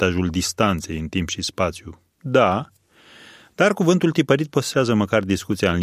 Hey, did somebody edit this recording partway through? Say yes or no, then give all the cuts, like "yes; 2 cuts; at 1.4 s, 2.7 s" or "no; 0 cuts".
no; 0 cuts